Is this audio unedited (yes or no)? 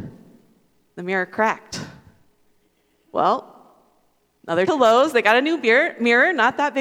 no